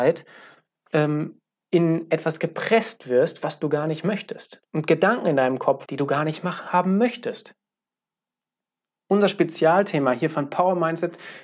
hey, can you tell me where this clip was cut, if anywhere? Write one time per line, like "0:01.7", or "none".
0:05.8